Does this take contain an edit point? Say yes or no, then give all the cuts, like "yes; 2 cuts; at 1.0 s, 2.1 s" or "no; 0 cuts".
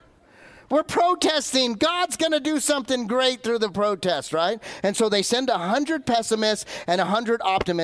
no; 0 cuts